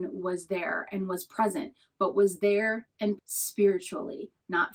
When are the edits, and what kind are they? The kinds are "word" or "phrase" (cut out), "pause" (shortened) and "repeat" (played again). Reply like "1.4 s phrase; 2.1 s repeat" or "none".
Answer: 3.2 s word

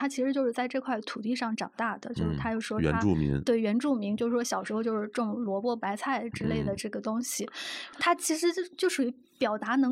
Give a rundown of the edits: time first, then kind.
none

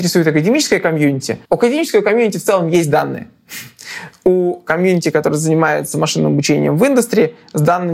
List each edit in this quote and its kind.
1.4 s pause

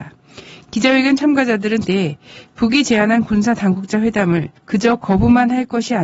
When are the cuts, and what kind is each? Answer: 1.8 s word; 4.6 s pause

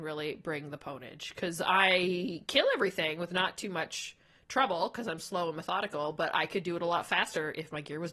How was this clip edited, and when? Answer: none

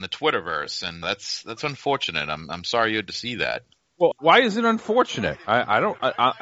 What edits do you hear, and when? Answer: 1.0 s word; 4.1 s word

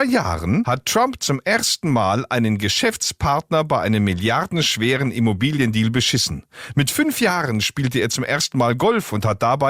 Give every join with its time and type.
none

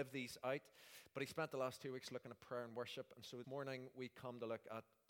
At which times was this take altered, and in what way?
3.4 s word

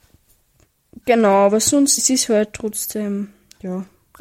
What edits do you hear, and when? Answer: 2.0 s word

